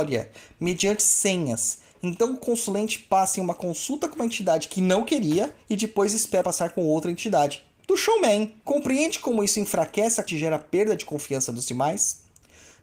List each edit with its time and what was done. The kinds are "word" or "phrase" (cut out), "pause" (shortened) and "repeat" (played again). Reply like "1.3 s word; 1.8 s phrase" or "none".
5.6 s pause; 6.4 s phrase; 8.6 s pause; 10.3 s word